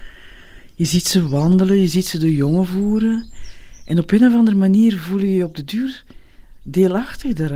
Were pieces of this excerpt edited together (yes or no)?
no